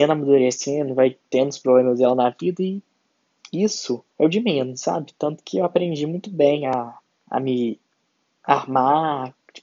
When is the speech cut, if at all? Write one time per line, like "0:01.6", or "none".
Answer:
0:04.1
0:07.1